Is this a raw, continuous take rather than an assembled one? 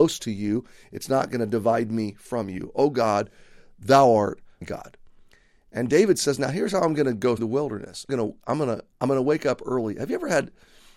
no; 4 cuts; at 4.6 s, 7.4 s, 8.1 s, 8.9 s

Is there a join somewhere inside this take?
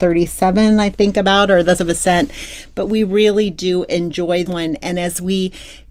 yes; 2 cuts; at 1.8 s, 4.5 s

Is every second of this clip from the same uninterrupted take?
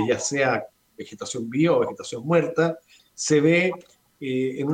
no; 1 cut; at 3.0 s

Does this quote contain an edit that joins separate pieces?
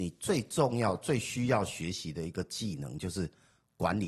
no; 0 cuts

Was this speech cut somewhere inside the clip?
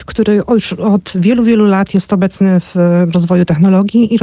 no; 0 cuts

